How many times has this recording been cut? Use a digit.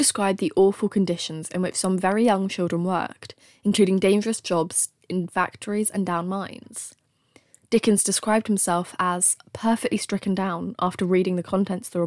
0